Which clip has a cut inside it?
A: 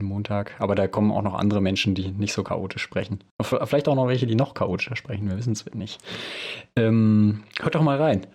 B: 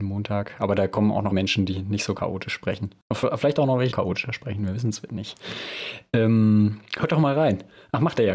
B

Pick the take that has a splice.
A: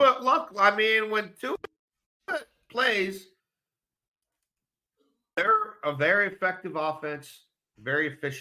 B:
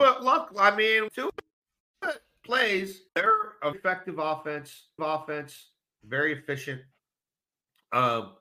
B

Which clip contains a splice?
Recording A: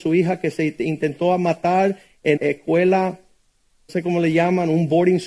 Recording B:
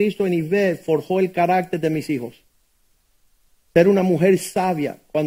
A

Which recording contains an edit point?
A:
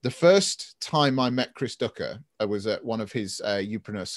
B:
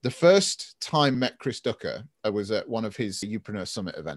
B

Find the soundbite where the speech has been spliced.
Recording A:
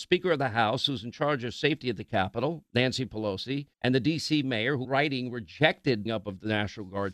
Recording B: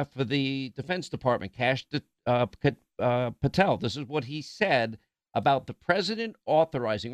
A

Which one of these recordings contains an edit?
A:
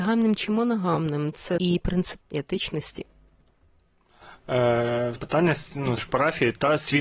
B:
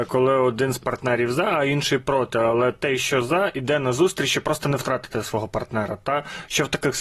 A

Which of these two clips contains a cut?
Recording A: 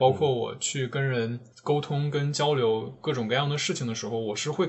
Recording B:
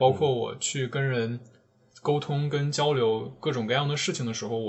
A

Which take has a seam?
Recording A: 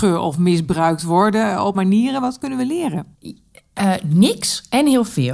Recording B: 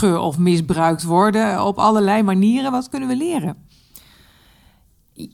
A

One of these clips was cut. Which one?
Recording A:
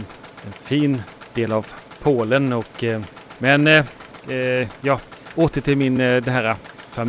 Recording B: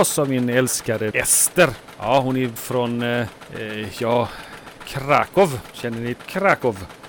B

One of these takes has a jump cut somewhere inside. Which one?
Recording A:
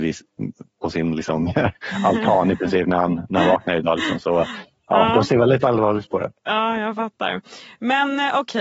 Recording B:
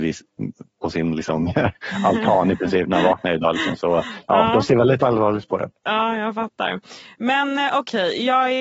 B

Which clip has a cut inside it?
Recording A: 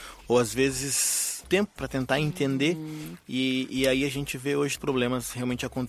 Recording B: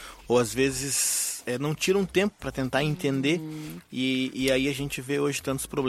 A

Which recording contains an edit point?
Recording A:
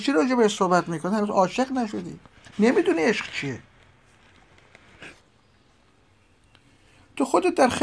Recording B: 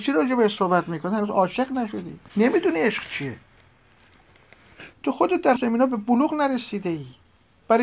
B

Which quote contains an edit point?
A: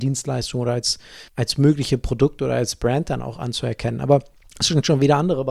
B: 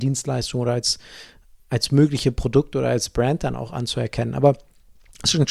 A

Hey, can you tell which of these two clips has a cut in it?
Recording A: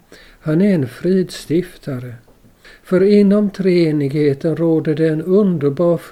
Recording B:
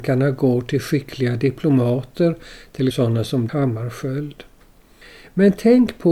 B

